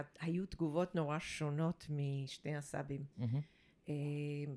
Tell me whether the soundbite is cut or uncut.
cut